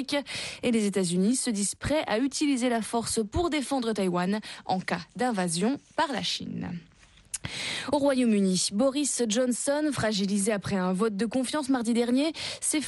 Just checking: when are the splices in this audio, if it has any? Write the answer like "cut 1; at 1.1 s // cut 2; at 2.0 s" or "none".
none

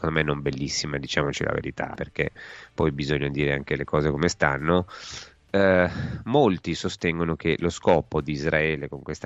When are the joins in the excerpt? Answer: cut 1; at 2.0 s

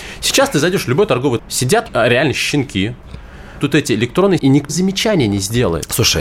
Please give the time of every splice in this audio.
cut 1; at 1.4 s // cut 2; at 1.9 s // cut 3; at 3.6 s // cut 4; at 4.4 s // cut 5; at 4.7 s

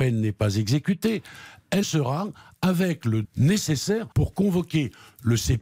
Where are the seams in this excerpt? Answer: cut 1; at 1.8 s // cut 2; at 3.2 s // cut 3; at 4.1 s

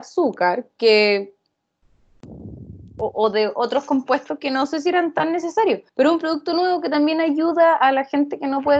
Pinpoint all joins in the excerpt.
cut 1; at 5.9 s

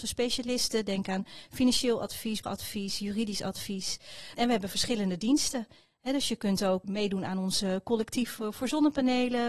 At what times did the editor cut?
cut 1; at 2.4 s

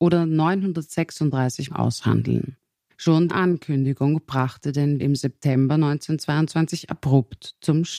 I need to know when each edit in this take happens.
cut 1; at 1.7 s // cut 2; at 3.3 s // cut 3; at 5.0 s

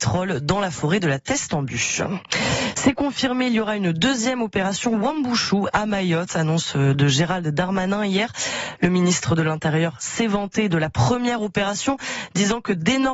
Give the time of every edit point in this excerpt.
none

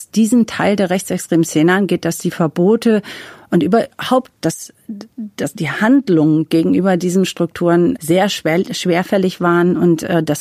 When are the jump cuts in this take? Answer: cut 1; at 8.0 s

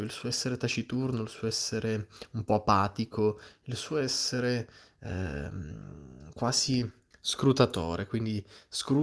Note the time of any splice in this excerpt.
cut 1; at 7.1 s

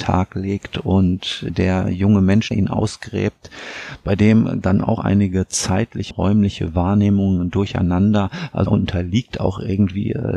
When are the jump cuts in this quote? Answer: cut 1; at 1.5 s // cut 2; at 2.5 s // cut 3; at 4.6 s // cut 4; at 5.0 s // cut 5; at 6.1 s // cut 6; at 8.7 s

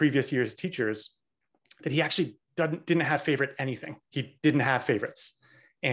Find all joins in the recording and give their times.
cut 1; at 2.4 s // cut 2; at 4.0 s

